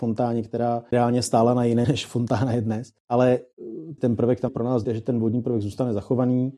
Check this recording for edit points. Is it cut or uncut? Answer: cut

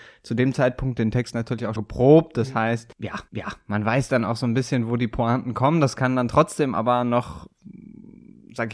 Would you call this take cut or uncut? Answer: cut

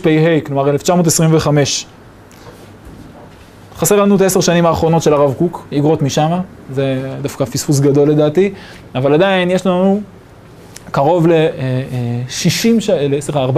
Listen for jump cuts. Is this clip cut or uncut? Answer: uncut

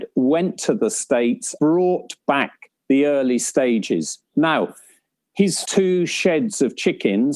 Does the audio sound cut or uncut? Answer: cut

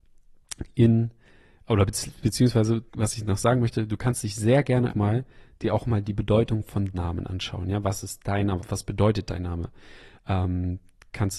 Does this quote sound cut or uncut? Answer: cut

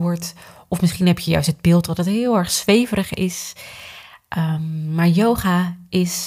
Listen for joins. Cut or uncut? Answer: uncut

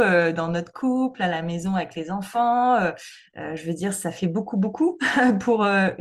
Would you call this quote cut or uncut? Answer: uncut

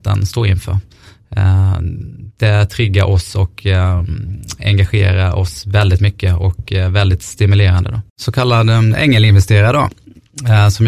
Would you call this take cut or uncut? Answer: cut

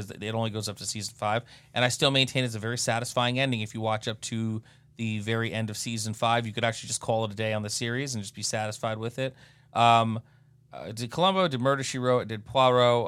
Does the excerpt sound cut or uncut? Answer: uncut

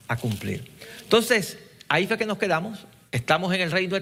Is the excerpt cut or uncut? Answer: uncut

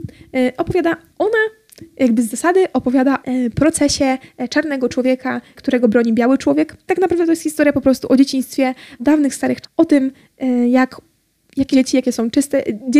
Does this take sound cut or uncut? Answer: cut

